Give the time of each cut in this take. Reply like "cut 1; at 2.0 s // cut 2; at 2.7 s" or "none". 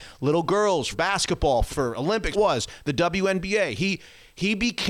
cut 1; at 0.9 s // cut 2; at 1.7 s // cut 3; at 2.3 s